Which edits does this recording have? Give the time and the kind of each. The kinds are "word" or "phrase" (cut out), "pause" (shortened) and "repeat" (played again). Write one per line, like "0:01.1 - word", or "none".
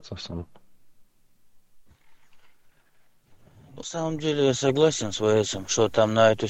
0:03.8 - word